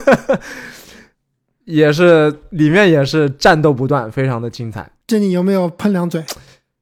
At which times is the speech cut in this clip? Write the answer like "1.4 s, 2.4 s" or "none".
5.0 s